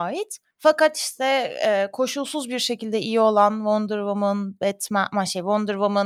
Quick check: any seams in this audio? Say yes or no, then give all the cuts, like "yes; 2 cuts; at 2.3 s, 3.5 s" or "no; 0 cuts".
no; 0 cuts